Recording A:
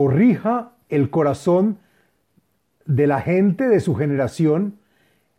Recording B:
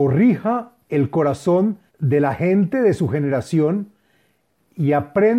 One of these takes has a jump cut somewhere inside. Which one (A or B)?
B